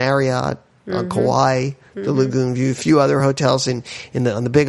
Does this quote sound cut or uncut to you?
uncut